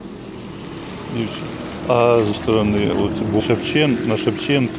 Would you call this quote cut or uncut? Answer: cut